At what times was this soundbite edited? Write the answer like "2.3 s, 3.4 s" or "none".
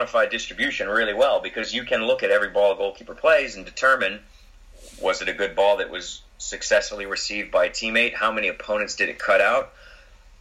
none